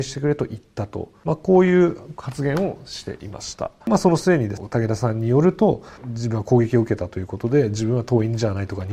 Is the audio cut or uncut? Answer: uncut